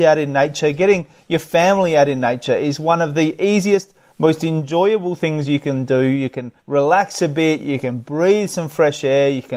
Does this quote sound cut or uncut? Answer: cut